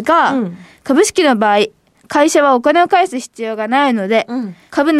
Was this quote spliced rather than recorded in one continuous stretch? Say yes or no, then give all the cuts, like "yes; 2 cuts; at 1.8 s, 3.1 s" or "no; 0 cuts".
no; 0 cuts